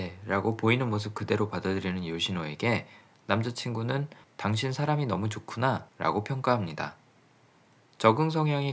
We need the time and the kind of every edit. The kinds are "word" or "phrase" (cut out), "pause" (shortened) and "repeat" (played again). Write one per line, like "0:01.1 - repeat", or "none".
0:04.2 - pause
0:05.9 - pause